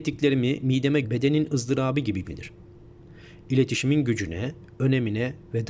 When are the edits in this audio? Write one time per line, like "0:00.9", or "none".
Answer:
0:01.0
0:02.2

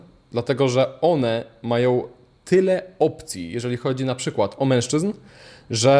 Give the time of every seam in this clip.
none

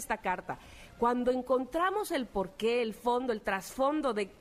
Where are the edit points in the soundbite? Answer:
none

